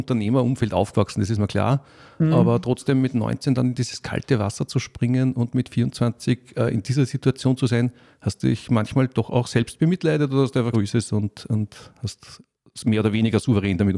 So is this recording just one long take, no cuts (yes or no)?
no